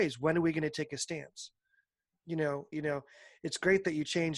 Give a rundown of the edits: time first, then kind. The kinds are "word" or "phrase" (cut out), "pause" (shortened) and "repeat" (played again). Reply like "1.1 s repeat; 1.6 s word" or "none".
2.2 s word; 2.7 s word